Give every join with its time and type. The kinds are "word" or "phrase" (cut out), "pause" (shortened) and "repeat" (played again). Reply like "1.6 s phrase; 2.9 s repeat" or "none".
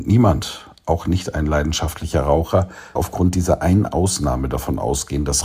3.0 s word